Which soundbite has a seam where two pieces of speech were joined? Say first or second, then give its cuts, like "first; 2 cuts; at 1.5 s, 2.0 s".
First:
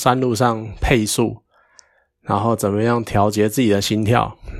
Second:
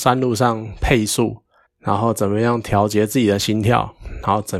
second; 1 cut; at 1.7 s